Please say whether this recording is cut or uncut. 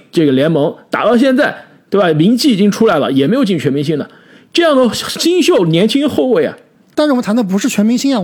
uncut